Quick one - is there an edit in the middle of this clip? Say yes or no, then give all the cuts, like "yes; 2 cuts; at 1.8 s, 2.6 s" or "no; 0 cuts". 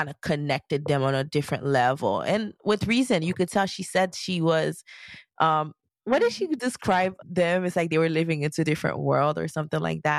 yes; 1 cut; at 7.2 s